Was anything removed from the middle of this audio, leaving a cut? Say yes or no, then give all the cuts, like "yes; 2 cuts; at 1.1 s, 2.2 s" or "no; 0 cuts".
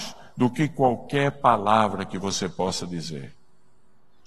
no; 0 cuts